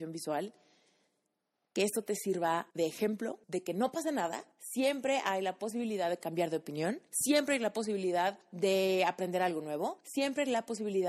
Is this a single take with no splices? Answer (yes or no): no